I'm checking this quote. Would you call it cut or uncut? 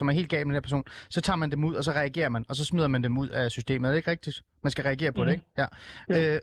uncut